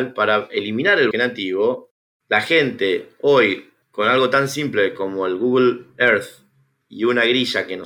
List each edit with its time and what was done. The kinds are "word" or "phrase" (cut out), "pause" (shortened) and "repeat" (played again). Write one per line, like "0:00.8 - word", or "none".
0:01.1 - word
0:03.8 - pause